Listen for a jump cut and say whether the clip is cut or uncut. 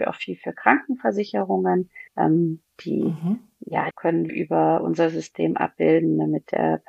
cut